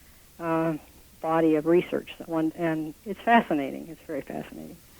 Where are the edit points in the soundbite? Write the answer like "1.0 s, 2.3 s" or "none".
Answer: 2.5 s